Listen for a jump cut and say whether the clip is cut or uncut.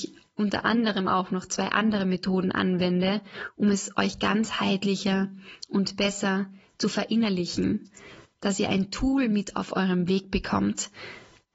uncut